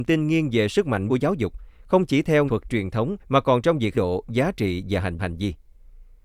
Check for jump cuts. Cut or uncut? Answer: cut